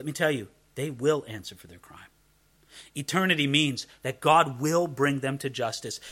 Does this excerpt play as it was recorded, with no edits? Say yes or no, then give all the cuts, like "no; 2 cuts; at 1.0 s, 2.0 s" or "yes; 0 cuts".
yes; 0 cuts